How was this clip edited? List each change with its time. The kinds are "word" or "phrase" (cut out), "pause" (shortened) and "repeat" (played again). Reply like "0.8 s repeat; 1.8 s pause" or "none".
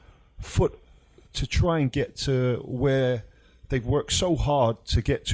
none